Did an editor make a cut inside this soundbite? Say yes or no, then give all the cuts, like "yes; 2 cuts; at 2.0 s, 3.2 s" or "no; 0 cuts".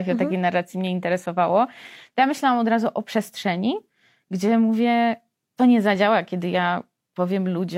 no; 0 cuts